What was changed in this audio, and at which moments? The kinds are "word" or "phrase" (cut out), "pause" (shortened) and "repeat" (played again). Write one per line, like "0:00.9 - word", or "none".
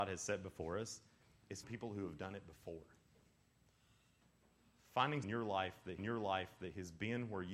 0:01.6 - word
0:05.2 - word
0:06.0 - repeat